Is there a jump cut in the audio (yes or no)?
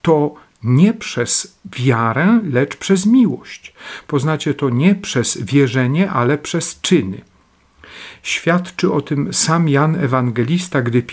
no